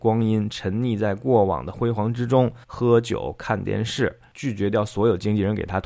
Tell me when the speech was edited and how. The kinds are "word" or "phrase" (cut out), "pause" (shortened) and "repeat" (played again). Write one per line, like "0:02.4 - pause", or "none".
0:02.6 - pause